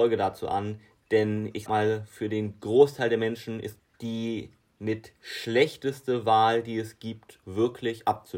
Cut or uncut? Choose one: cut